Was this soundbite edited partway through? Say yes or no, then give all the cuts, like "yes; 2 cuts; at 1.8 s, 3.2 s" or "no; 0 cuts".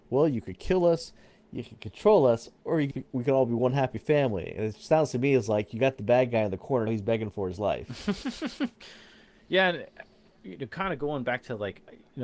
yes; 2 cuts; at 2.9 s, 6.9 s